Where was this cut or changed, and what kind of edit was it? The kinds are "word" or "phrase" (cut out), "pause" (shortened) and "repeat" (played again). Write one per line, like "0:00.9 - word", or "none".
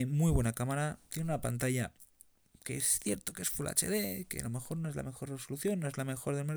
none